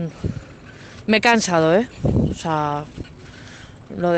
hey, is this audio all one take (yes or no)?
yes